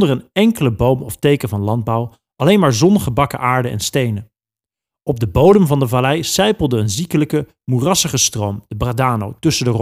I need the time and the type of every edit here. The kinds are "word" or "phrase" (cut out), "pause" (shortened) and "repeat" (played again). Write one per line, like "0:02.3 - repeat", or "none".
none